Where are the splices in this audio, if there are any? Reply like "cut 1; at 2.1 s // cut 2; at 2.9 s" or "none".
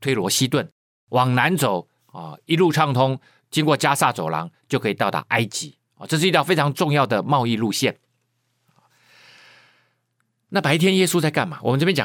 none